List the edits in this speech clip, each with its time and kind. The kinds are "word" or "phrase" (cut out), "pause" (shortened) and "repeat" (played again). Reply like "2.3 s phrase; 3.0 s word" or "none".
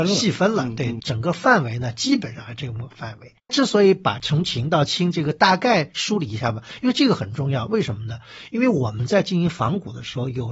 1.0 s phrase; 3.4 s pause